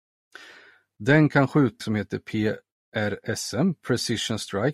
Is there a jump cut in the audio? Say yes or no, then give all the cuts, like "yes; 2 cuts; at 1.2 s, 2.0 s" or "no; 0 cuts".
yes; 1 cut; at 1.8 s